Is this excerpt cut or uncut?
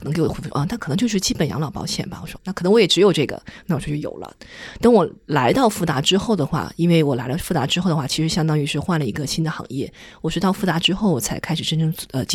cut